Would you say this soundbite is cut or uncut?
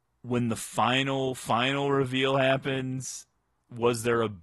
uncut